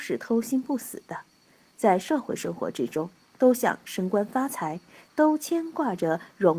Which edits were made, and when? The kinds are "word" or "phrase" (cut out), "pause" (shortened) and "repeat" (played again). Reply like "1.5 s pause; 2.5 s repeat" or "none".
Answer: none